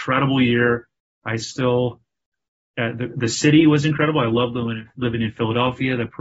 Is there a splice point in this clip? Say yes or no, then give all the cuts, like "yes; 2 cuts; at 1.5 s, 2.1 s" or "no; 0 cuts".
no; 0 cuts